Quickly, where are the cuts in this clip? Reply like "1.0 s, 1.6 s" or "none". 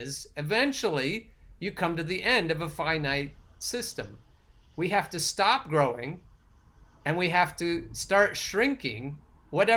none

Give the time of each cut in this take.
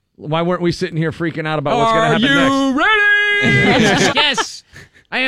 4.1 s

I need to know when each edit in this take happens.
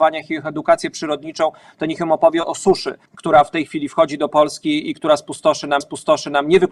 3.1 s, 5.8 s

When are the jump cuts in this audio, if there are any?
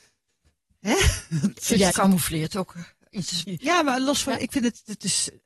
1.9 s, 3.4 s

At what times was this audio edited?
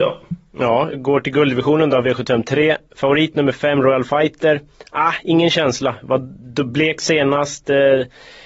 0.9 s

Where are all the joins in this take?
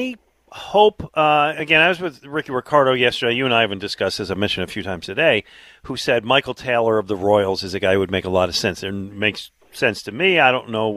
none

